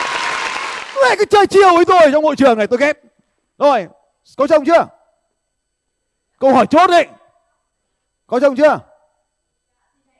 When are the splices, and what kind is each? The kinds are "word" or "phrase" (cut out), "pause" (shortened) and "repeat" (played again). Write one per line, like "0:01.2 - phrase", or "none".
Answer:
none